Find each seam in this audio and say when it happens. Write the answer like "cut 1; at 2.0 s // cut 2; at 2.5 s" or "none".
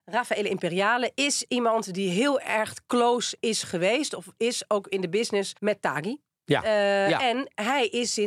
cut 1; at 5.6 s